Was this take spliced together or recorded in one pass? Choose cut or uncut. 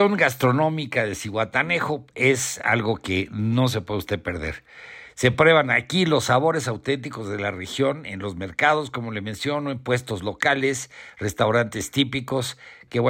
uncut